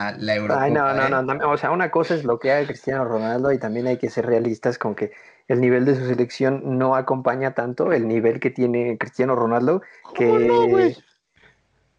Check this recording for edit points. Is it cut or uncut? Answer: uncut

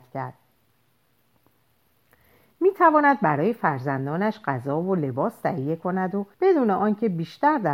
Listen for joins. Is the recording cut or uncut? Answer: cut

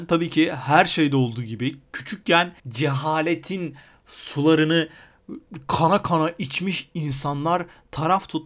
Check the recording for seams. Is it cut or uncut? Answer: cut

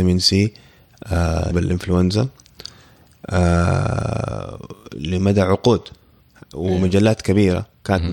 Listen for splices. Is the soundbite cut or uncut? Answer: cut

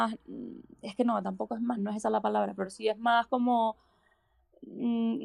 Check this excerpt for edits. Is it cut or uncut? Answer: cut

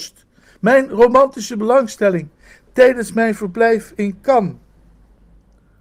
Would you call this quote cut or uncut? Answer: uncut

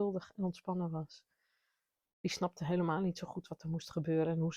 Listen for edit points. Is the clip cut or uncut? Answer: uncut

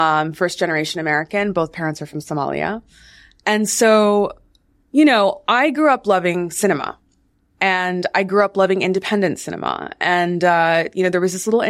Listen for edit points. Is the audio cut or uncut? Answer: uncut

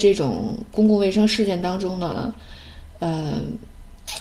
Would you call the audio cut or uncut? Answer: uncut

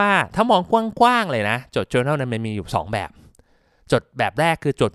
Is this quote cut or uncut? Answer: uncut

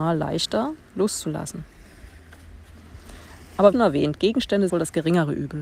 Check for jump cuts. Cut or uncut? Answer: cut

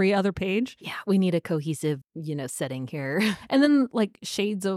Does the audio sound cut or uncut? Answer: cut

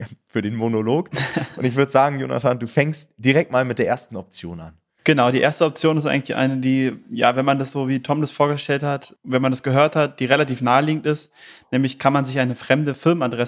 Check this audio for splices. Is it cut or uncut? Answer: uncut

